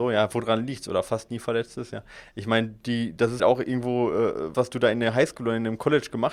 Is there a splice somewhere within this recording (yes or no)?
yes